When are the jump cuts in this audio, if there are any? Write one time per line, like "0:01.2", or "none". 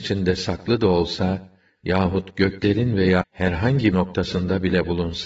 0:03.2
0:03.9